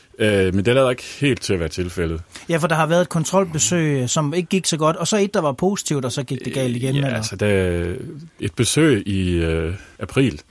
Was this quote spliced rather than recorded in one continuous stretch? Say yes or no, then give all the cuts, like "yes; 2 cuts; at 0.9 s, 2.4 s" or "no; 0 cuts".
no; 0 cuts